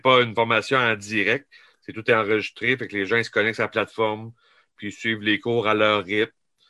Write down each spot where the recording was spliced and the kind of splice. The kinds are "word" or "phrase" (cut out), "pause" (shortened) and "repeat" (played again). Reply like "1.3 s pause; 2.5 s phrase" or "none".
none